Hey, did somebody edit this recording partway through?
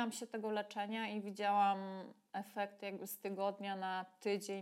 no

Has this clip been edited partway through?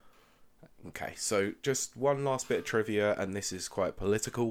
no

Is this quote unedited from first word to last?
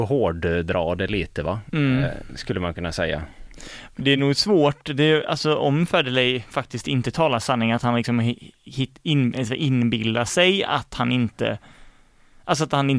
yes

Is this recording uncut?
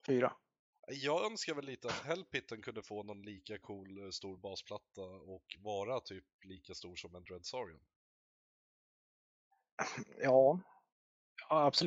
yes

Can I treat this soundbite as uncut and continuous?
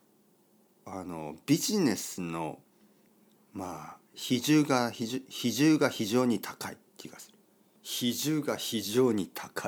no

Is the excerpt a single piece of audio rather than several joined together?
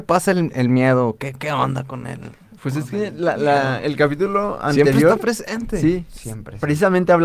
yes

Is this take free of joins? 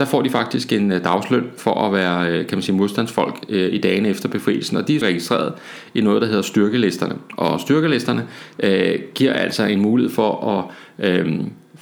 no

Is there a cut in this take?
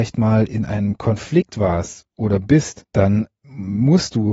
no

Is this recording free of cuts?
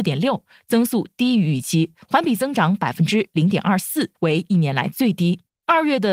no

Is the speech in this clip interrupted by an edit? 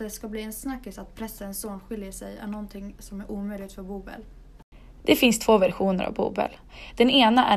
no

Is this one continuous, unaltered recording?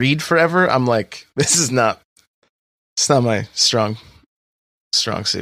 yes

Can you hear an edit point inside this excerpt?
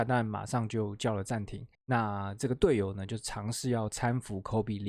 yes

